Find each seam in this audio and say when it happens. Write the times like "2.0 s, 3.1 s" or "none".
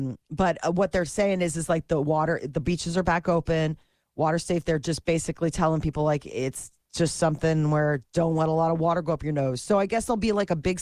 none